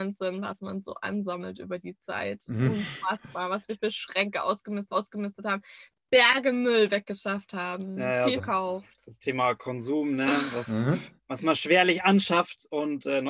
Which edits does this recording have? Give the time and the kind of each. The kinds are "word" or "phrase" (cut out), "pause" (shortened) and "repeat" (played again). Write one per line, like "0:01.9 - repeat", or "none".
0:04.9 - repeat
0:08.4 - word
0:11.2 - pause